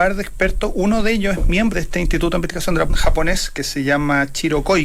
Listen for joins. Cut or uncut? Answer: cut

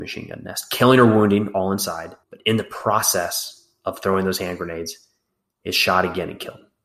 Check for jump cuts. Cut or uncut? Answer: cut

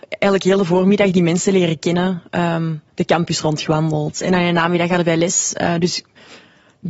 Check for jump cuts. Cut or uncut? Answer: cut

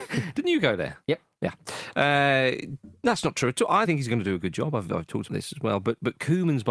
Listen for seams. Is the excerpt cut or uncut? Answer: cut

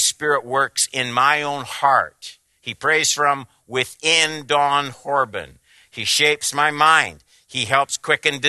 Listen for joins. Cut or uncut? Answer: uncut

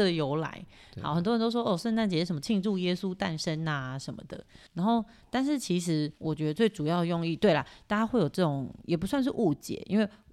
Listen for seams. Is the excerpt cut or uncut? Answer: cut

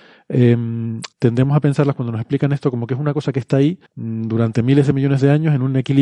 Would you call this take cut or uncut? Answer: cut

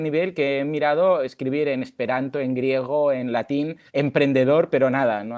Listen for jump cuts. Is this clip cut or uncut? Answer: cut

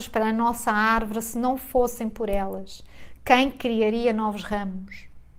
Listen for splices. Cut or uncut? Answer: uncut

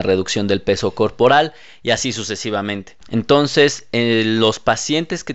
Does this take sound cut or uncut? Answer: uncut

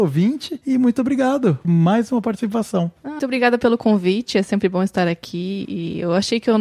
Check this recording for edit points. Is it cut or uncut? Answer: cut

